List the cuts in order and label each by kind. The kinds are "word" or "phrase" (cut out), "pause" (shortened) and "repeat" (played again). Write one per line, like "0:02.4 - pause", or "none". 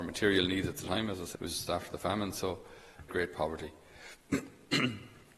0:01.3 - word
0:01.7 - word
0:03.1 - phrase